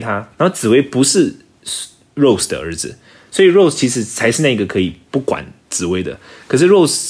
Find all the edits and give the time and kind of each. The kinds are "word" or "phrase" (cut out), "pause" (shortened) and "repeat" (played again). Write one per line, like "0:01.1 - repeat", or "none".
none